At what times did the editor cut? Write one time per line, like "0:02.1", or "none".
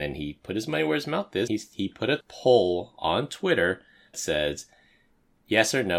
0:01.5
0:02.2
0:04.1